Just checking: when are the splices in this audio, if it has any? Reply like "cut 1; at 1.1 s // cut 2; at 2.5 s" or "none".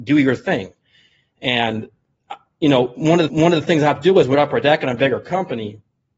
cut 1; at 3.3 s // cut 2; at 4.3 s